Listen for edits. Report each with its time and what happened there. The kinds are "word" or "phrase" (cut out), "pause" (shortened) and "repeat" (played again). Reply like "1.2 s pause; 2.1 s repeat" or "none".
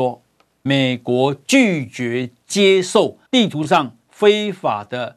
3.3 s pause